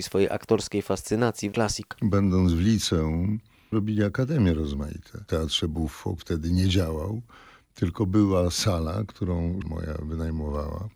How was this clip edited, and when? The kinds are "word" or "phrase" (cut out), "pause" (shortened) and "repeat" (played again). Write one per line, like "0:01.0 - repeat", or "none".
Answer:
0:01.5 - phrase
0:03.7 - word
0:05.3 - word
0:06.2 - word
0:09.6 - word